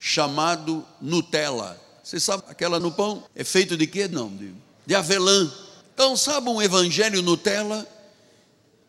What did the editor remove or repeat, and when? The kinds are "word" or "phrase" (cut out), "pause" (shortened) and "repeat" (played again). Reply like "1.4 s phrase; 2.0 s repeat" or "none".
2.4 s word; 2.8 s phrase; 3.3 s pause; 4.1 s word; 4.7 s pause; 5.8 s pause